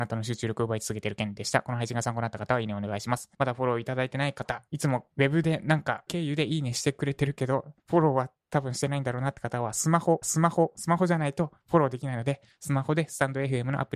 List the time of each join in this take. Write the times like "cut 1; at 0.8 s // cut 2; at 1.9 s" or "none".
cut 1; at 3.3 s // cut 2; at 4.7 s // cut 3; at 5.1 s // cut 4; at 6.1 s // cut 5; at 7.8 s // cut 6; at 10.2 s